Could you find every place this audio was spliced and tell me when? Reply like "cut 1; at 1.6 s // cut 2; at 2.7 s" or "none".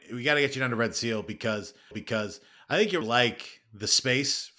cut 1; at 1.9 s // cut 2; at 3.0 s

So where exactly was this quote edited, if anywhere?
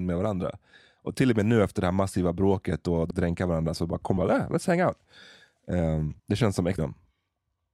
cut 1; at 3.1 s // cut 2; at 4.2 s // cut 3; at 6.2 s // cut 4; at 6.8 s

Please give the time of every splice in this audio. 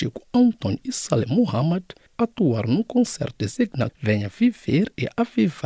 cut 1; at 2.1 s

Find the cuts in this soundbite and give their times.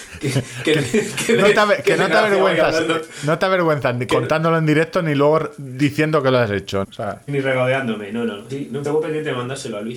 cut 1; at 6.8 s // cut 2; at 7.3 s // cut 3; at 8.5 s // cut 4; at 8.8 s

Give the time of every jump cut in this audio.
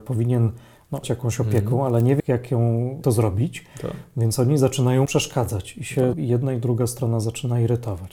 cut 1; at 1.0 s // cut 2; at 2.2 s // cut 3; at 3.0 s // cut 4; at 5.1 s // cut 5; at 6.1 s

